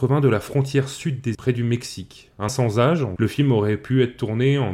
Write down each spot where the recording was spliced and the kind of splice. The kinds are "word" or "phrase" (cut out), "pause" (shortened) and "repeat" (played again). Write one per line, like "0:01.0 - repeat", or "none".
0:01.3 - word
0:02.5 - word
0:03.2 - word